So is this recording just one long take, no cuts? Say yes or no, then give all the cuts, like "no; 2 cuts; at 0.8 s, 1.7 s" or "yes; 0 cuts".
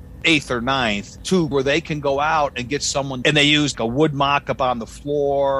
no; 3 cuts; at 1.5 s, 3.2 s, 3.7 s